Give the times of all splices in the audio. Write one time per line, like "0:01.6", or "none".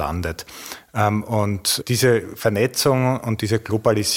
none